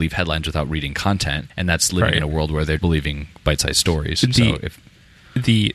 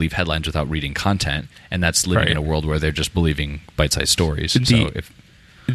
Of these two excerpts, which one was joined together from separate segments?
first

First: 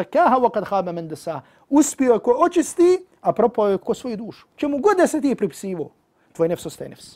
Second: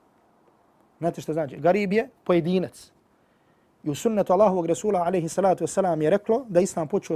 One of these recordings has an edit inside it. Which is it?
first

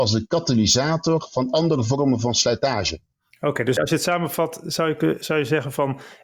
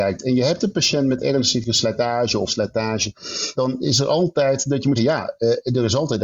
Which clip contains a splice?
second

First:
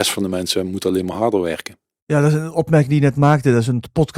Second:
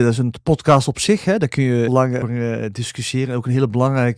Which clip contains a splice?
second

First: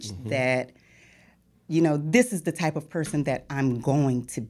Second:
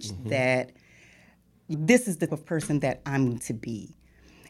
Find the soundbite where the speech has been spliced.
second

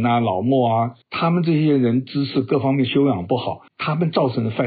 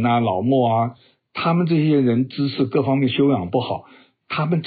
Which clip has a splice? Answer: first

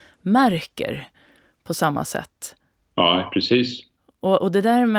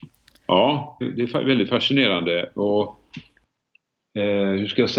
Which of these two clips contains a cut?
second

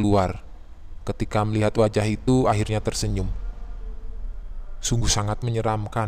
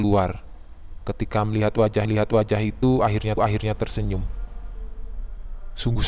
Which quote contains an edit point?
second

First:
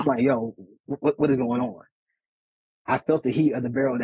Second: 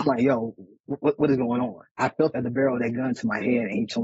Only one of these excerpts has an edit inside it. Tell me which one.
second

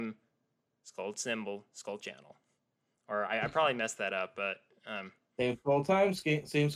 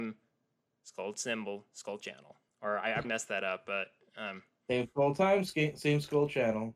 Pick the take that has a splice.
second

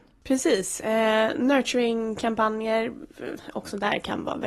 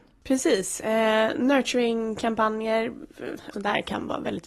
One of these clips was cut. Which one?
second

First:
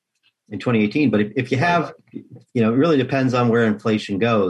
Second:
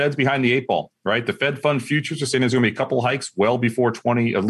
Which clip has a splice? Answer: first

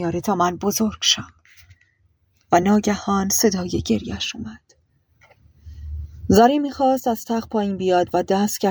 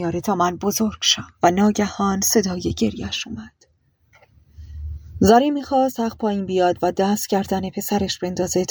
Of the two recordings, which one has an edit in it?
second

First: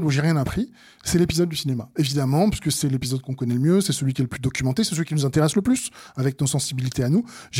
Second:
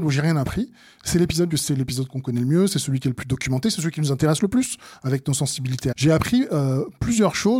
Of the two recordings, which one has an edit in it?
second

